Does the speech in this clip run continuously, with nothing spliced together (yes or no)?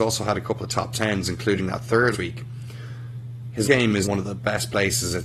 no